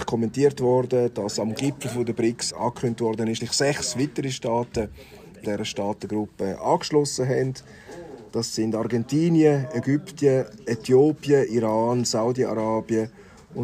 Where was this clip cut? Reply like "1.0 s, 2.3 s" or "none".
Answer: 2.5 s, 3.4 s, 5.4 s